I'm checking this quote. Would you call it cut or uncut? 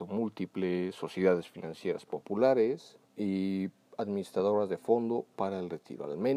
cut